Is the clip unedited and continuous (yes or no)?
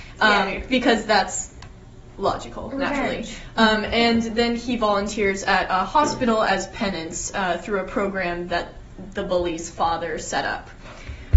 yes